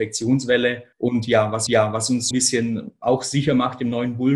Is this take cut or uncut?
cut